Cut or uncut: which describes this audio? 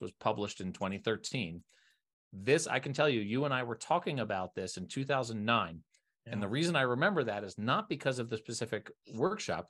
uncut